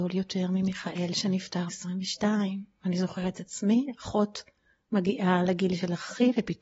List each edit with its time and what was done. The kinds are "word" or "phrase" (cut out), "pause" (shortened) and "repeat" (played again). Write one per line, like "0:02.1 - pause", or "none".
0:01.7 - word